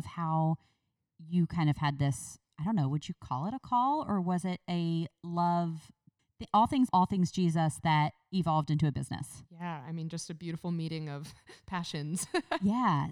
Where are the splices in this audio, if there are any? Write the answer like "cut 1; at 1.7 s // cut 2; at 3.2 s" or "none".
cut 1; at 6.2 s // cut 2; at 6.9 s